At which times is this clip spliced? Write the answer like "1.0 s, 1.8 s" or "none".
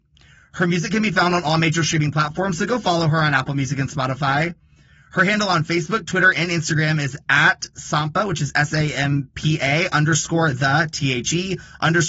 none